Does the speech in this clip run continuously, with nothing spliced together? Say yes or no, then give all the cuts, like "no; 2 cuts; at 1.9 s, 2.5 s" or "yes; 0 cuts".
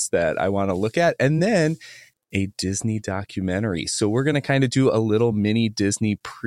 yes; 0 cuts